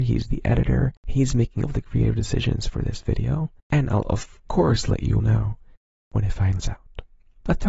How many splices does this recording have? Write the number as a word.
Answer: five